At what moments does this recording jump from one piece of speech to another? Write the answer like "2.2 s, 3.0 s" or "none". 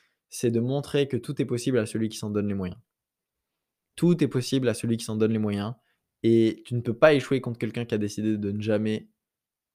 none